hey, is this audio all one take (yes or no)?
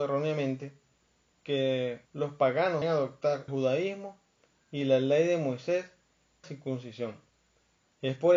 no